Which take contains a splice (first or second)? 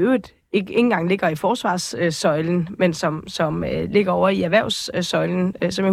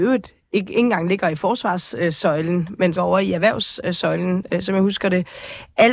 second